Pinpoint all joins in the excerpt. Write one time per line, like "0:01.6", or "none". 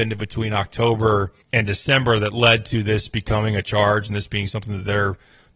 0:01.4